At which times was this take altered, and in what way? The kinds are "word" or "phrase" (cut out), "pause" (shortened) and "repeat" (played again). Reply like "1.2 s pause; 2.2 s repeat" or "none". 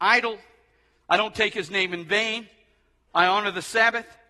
none